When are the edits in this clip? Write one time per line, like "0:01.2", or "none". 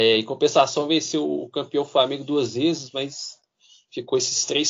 none